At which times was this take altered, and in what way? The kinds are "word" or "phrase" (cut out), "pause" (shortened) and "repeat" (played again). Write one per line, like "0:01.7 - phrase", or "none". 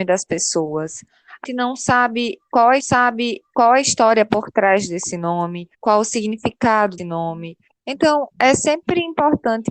0:01.4 - word
0:02.8 - repeat
0:05.7 - pause
0:07.0 - word